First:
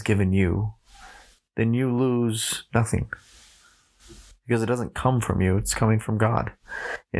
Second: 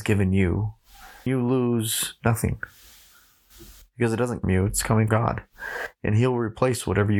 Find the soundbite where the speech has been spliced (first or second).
second